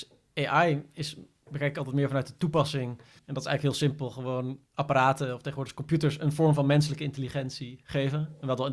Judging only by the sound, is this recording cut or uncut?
cut